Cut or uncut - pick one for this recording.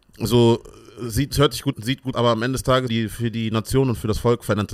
cut